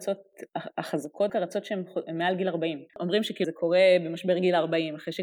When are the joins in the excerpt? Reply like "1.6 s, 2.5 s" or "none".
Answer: 1.3 s, 2.9 s, 3.4 s